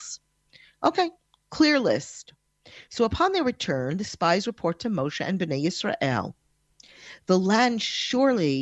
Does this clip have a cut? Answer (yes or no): no